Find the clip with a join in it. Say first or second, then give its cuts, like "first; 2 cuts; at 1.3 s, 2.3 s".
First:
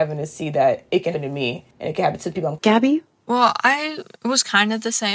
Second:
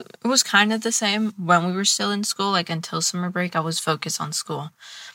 first; 3 cuts; at 1.1 s, 1.7 s, 2.6 s